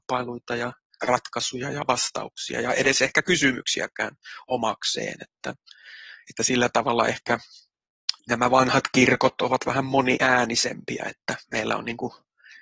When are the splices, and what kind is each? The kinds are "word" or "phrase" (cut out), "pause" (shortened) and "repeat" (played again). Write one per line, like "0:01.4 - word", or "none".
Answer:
0:08.2 - pause